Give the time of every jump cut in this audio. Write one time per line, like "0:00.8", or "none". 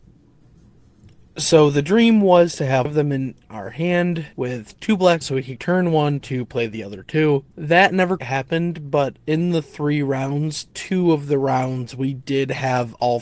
0:02.9
0:04.3
0:05.2
0:05.6
0:06.2
0:07.5
0:08.2